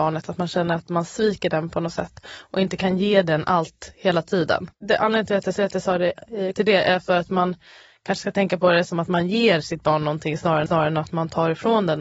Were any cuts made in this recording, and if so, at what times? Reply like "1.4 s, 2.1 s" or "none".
4.7 s, 5.6 s, 6.5 s, 10.7 s